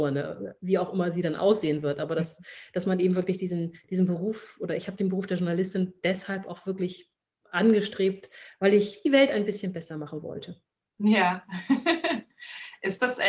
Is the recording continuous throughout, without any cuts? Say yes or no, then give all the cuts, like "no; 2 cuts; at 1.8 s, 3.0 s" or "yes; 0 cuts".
no; 2 cuts; at 6.0 s, 9.0 s